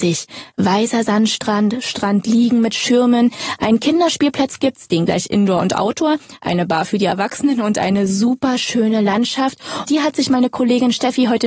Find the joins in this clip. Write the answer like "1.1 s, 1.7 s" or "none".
5.1 s, 9.9 s

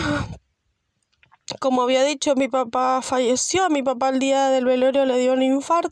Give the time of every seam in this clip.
none

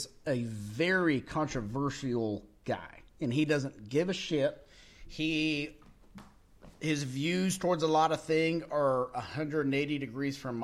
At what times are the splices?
3.1 s, 6.7 s

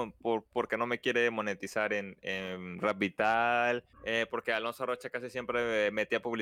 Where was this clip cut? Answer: 3.9 s

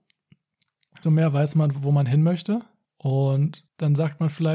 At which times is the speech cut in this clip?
1.0 s

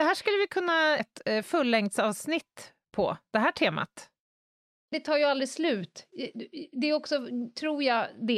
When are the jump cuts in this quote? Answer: 1.0 s, 4.9 s

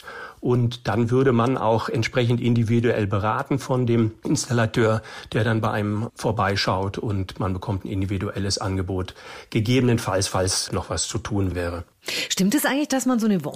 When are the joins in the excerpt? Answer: 10.7 s

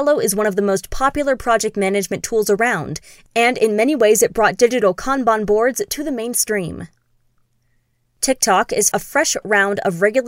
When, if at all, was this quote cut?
8.9 s

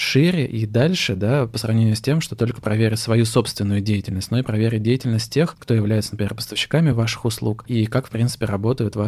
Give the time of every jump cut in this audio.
none

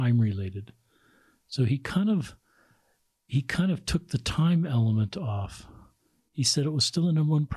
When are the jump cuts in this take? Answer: none

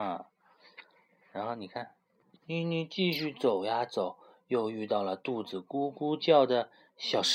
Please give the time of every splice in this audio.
2.4 s

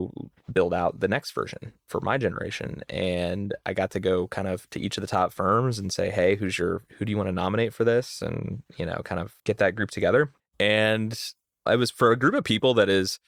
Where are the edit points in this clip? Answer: 9.4 s, 10.4 s

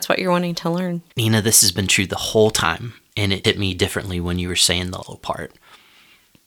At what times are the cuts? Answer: 1.1 s, 3.4 s, 5.0 s

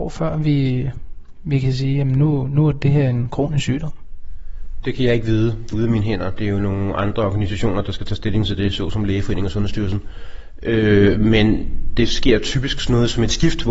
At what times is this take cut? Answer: 5.7 s

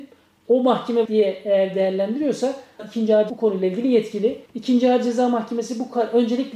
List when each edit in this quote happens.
1.0 s, 2.8 s, 3.3 s, 4.5 s

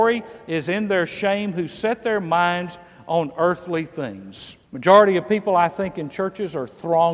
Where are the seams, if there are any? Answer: 4.6 s

